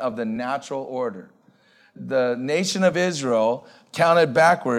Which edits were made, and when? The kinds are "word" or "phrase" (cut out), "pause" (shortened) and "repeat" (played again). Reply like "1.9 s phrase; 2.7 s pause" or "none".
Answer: none